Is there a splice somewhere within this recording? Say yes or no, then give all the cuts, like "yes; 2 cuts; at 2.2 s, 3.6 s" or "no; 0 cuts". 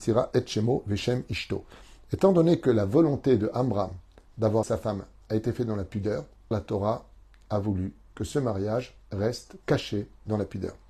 yes; 2 cuts; at 4.6 s, 6.5 s